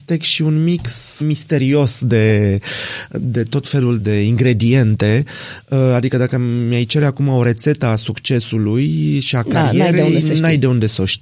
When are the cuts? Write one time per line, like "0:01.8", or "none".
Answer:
0:01.2
0:04.0